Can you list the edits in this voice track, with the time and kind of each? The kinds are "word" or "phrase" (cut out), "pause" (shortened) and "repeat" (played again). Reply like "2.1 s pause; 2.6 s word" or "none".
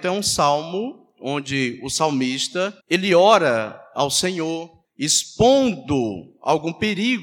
2.8 s pause; 4.8 s pause